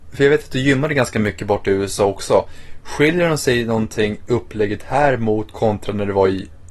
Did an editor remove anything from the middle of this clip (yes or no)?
no